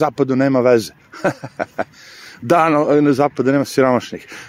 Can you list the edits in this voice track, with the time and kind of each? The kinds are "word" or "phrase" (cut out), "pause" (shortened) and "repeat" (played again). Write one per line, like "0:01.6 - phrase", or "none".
none